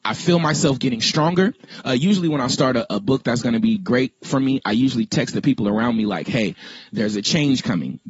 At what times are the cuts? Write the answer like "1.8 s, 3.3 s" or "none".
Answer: 2.9 s